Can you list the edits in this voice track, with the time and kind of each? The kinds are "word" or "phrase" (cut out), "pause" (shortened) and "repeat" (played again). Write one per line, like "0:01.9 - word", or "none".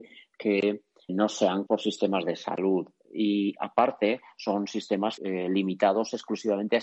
0:01.1 - word
0:01.7 - word
0:05.2 - word